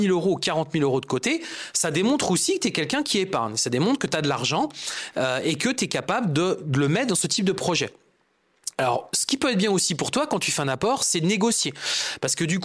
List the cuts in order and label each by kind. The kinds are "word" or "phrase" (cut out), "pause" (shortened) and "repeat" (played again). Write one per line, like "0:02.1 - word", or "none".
0:08.7 - pause